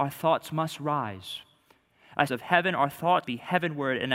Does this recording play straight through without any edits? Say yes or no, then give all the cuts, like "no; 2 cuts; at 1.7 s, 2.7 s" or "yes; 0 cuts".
no; 2 cuts; at 2.3 s, 3.2 s